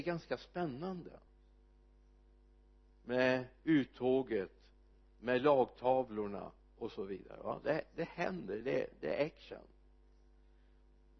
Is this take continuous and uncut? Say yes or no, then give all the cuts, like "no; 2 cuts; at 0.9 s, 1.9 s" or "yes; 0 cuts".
yes; 0 cuts